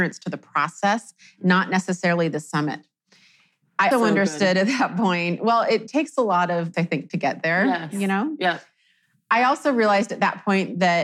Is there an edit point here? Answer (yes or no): yes